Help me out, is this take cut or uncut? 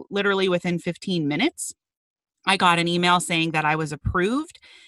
uncut